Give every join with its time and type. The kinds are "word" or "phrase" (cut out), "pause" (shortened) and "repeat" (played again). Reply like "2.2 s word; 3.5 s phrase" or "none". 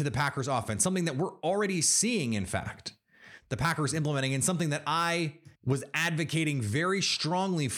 5.6 s pause